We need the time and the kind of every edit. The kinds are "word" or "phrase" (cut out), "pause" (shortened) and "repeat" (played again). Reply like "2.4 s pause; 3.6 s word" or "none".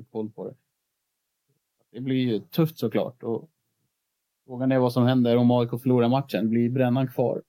none

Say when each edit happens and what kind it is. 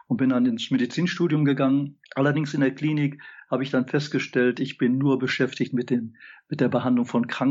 2.1 s pause

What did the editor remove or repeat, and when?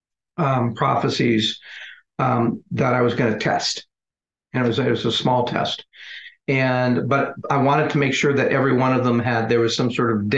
7.4 s word

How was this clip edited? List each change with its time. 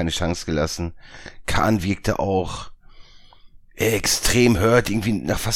none

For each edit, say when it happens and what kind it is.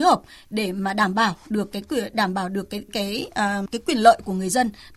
2.9 s word; 3.7 s word

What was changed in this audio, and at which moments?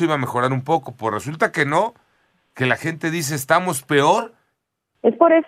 none

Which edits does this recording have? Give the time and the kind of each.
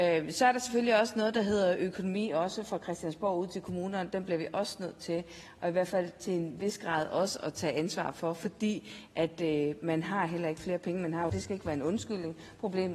11.3 s phrase

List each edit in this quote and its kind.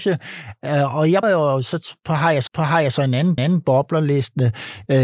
1.2 s word; 2.5 s repeat; 3.4 s repeat

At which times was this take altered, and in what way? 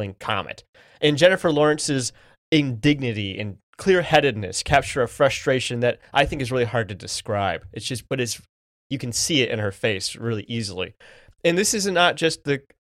none

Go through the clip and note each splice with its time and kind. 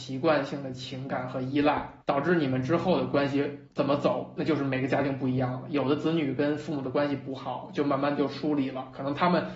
2.0 s pause; 3.7 s pause

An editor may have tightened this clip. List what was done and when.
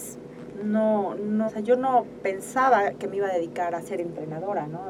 1.5 s word

